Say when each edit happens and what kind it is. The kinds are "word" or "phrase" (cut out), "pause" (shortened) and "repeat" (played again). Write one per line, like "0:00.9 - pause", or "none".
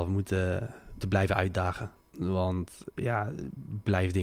0:01.0 - word
0:02.0 - pause